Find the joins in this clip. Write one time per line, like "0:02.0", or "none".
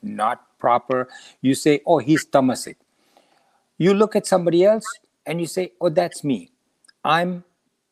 none